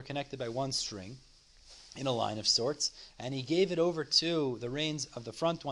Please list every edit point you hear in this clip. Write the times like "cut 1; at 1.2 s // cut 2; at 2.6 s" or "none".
none